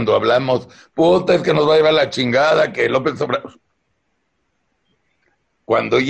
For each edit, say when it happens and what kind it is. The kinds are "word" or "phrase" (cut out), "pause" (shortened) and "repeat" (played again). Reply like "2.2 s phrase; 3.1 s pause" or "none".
none